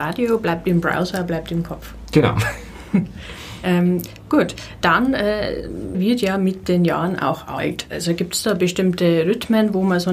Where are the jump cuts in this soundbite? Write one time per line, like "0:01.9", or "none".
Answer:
0:05.9